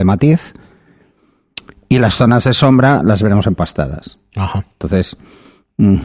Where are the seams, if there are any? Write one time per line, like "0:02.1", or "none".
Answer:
none